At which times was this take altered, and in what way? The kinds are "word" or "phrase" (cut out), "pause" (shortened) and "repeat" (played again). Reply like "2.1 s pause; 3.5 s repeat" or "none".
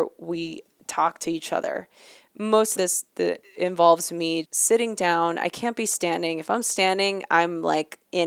2.8 s phrase; 4.4 s word